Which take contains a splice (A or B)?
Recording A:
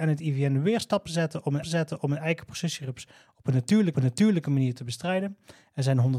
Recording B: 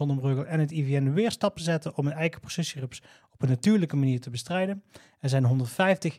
A